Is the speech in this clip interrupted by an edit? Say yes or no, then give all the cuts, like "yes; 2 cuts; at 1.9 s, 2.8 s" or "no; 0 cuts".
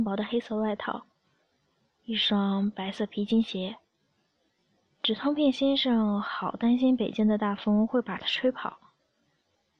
no; 0 cuts